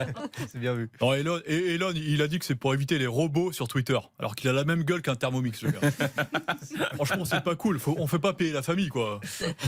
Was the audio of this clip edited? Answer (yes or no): no